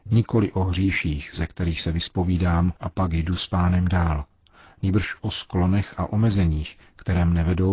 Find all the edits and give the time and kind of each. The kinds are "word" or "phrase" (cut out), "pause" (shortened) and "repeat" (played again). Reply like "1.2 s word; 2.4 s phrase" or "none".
2.8 s pause

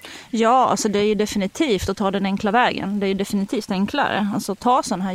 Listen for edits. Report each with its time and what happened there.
none

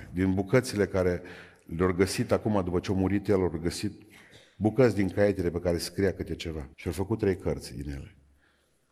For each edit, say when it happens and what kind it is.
6.7 s pause

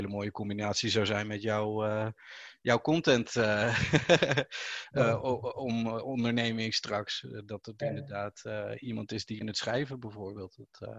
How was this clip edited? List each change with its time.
9.4 s phrase

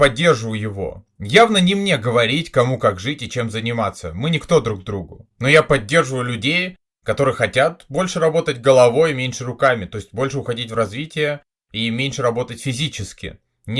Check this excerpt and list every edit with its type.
5.3 s pause

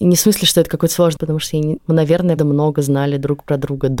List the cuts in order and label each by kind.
1.2 s word; 1.8 s word; 2.4 s word

